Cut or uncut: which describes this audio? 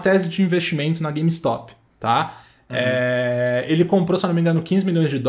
uncut